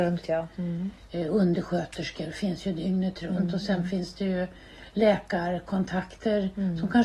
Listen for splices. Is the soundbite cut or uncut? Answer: uncut